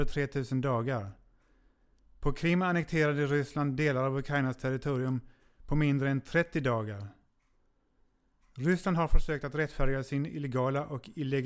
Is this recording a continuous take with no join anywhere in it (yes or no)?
yes